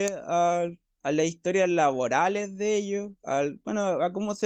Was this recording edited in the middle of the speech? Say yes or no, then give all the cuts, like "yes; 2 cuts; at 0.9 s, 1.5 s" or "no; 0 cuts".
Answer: yes; 1 cut; at 3.2 s